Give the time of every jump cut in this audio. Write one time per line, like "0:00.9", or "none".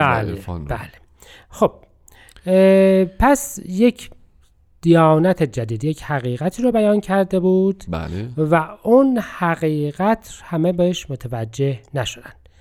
none